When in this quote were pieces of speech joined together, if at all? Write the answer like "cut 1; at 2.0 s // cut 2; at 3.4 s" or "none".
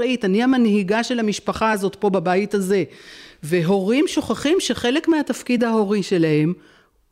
none